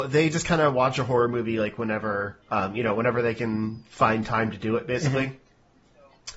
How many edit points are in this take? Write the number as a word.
one